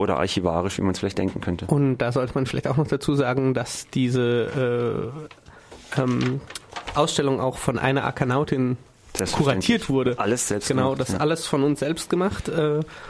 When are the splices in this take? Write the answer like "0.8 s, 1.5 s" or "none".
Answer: none